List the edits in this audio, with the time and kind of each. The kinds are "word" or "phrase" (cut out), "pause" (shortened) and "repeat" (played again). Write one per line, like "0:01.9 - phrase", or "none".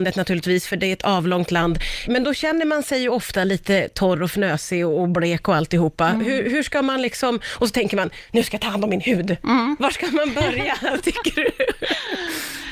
0:02.1 - word

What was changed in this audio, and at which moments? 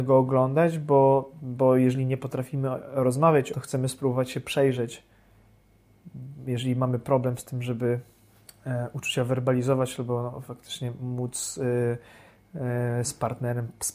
0:03.5 - phrase
0:08.5 - pause

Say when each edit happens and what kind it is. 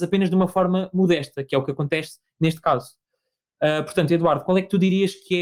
none

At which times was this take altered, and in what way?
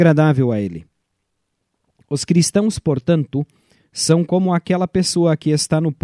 none

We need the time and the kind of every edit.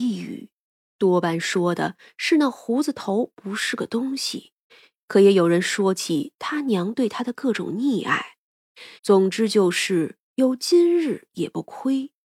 0:04.7 - pause
0:09.0 - pause
0:10.2 - pause

